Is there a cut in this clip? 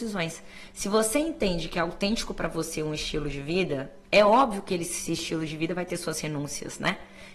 yes; 1 cut; at 4.0 s

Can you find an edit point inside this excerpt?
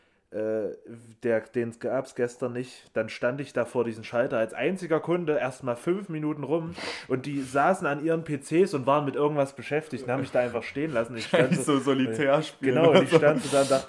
no; 0 cuts

